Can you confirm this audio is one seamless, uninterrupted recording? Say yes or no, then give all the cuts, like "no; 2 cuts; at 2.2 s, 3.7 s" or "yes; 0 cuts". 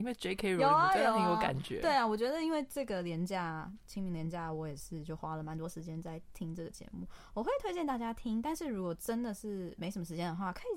yes; 0 cuts